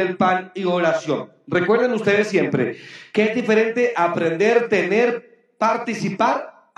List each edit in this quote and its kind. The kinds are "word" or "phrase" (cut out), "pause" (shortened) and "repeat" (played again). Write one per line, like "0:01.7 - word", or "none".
none